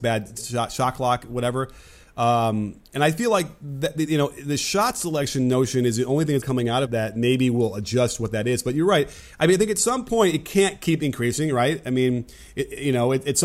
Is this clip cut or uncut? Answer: cut